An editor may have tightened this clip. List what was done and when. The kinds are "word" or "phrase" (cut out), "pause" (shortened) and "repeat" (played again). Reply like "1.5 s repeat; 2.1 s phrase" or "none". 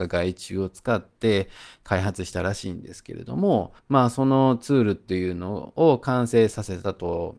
3.8 s pause